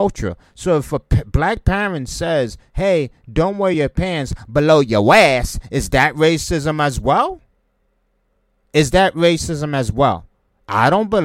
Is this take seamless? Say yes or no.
yes